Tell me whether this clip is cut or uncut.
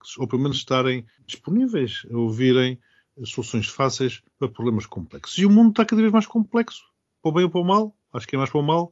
uncut